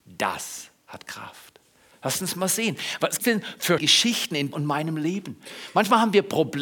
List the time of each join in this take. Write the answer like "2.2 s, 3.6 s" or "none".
3.2 s, 3.8 s, 4.5 s